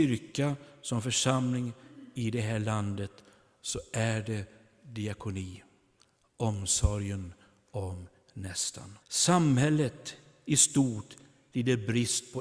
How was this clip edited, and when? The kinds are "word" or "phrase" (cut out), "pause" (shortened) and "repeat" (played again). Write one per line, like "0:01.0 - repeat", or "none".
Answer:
0:09.0 - pause